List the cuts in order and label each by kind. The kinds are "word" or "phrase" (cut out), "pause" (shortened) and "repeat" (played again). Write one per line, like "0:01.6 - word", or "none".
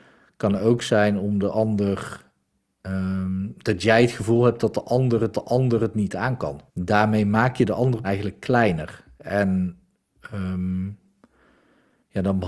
0:05.3 - repeat
0:06.7 - pause
0:08.0 - word